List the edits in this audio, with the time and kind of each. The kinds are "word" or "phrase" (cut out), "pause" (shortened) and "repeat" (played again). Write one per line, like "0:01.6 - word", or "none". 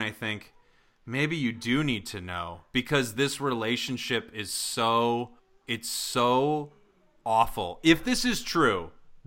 0:05.4 - pause

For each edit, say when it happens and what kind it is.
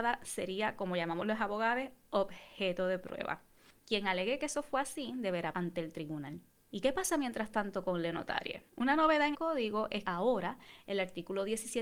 0:05.5 - word
0:06.5 - pause
0:08.7 - pause
0:09.3 - word
0:10.0 - word

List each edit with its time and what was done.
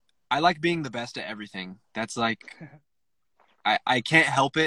none

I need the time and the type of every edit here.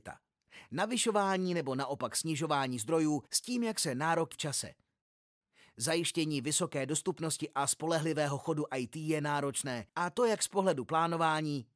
0:03.3 - pause
0:04.3 - word
0:09.9 - pause

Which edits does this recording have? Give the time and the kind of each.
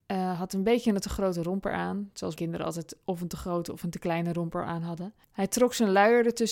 0:02.3 - word
0:05.2 - pause

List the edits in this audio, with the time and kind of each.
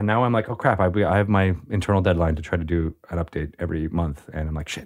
none

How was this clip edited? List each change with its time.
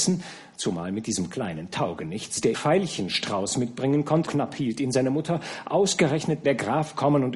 0:02.5 - phrase
0:04.3 - word
0:06.4 - phrase

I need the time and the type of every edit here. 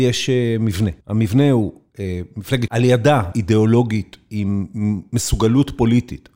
0:01.0 - pause
0:02.7 - phrase
0:03.3 - word

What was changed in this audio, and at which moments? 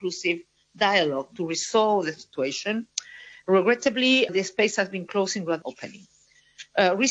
0:04.3 - word
0:05.6 - word

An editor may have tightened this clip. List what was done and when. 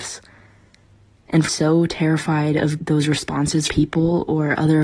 0:01.5 - phrase
0:02.8 - word
0:03.7 - phrase

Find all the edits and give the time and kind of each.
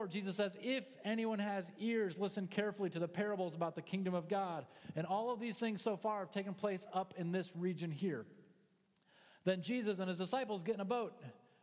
none

